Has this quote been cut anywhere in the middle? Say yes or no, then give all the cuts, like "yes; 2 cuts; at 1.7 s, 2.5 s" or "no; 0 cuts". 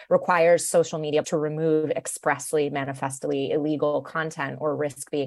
yes; 1 cut; at 1.2 s